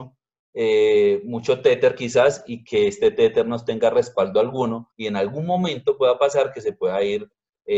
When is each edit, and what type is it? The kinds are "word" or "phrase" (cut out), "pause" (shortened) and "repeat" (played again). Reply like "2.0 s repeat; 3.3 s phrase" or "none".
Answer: 4.9 s pause